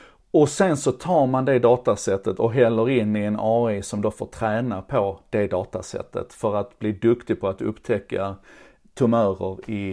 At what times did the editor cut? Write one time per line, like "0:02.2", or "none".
none